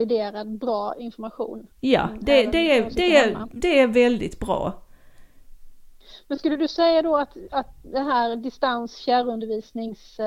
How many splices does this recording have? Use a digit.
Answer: 1